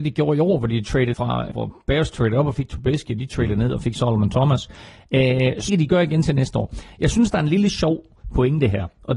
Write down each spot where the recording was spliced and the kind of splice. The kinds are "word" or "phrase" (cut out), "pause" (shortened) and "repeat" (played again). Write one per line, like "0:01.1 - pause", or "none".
0:01.1 - word
0:01.5 - word
0:05.7 - word